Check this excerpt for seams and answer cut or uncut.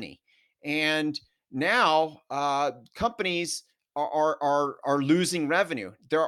uncut